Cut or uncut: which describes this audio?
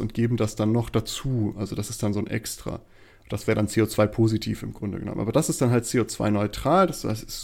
uncut